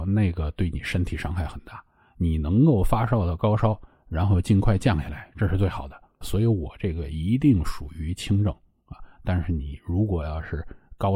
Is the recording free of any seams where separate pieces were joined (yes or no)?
no